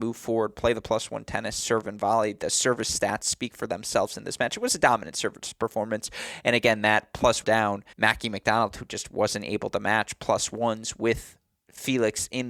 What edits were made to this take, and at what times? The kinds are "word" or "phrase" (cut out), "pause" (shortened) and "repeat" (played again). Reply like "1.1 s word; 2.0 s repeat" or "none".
7.4 s phrase; 7.9 s pause